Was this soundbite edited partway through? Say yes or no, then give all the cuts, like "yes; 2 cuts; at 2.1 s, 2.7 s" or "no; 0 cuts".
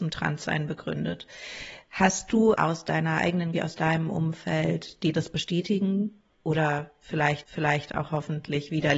yes; 3 cuts; at 2.5 s, 3.5 s, 7.4 s